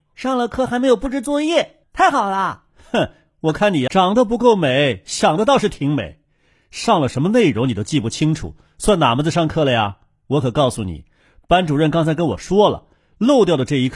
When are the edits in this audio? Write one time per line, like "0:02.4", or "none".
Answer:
0:01.8
0:03.9